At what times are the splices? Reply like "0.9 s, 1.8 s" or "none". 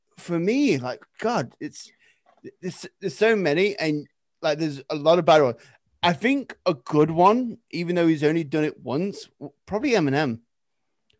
none